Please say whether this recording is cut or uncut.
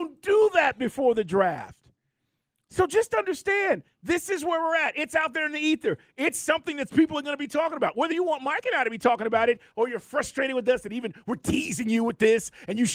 uncut